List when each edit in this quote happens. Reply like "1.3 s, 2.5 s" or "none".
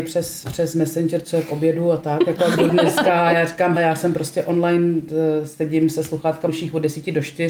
2.7 s, 3.8 s, 6.5 s